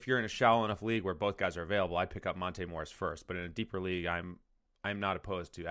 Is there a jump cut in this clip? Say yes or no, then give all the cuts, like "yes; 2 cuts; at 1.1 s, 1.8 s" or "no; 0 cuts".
no; 0 cuts